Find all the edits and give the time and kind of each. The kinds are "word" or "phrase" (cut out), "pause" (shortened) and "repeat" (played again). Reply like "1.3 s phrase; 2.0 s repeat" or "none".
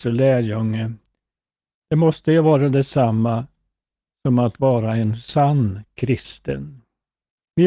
none

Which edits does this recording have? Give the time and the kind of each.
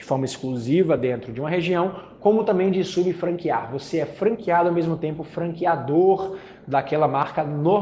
none

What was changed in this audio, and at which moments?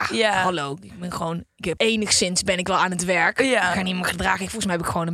1.8 s word

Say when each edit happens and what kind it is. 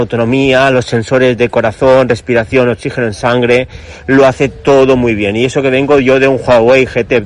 none

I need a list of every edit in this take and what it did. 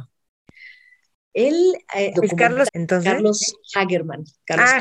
2.1 s phrase; 2.7 s word

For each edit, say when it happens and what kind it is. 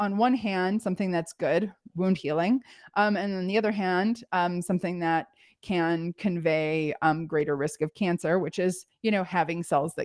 none

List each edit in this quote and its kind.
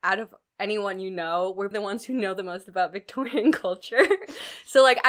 1.7 s word

